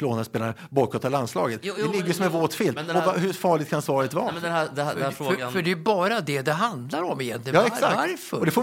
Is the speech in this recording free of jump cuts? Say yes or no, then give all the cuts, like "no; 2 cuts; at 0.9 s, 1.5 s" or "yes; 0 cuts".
yes; 0 cuts